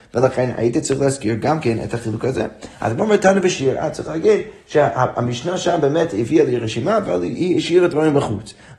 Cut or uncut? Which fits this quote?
uncut